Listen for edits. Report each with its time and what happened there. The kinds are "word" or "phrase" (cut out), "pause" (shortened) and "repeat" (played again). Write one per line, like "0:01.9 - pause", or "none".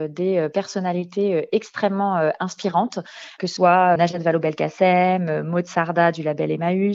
0:03.6 - word
0:04.0 - word